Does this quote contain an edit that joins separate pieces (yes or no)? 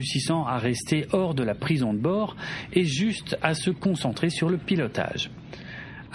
no